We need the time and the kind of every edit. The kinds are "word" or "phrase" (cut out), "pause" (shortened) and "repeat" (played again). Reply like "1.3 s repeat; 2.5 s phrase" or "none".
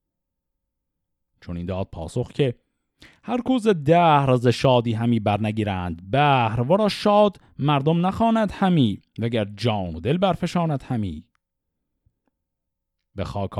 9.1 s pause